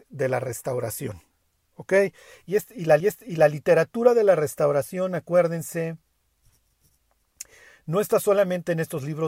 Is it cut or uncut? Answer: cut